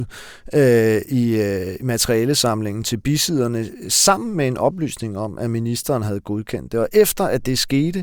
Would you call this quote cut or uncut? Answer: uncut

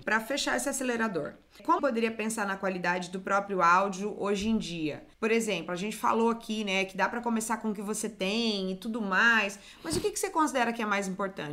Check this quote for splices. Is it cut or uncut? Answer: cut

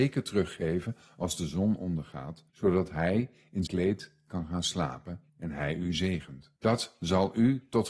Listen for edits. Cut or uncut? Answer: cut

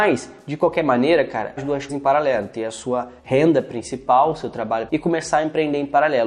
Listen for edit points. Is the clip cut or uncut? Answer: cut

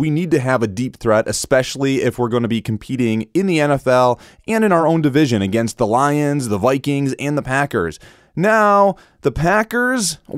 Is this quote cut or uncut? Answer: uncut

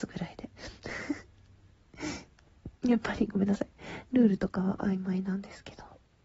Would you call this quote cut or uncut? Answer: cut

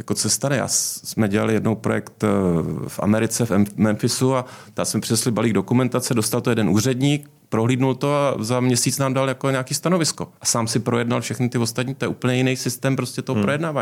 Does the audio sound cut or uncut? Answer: cut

